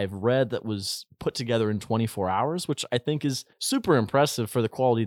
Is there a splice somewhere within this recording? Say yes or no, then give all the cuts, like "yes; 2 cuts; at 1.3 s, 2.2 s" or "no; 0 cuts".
yes; 1 cut; at 3.5 s